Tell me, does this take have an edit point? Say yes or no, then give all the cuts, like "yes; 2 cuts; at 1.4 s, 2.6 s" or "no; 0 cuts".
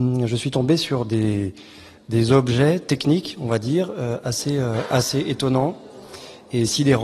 no; 0 cuts